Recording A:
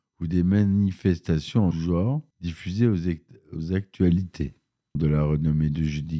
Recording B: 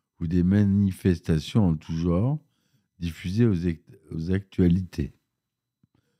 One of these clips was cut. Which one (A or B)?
A